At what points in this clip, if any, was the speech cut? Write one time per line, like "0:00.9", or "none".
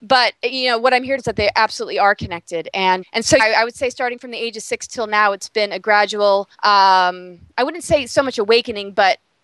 0:01.2
0:03.0
0:03.4
0:06.5